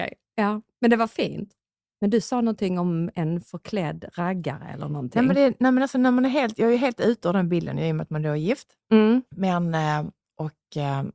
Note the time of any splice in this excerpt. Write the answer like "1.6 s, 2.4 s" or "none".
9.3 s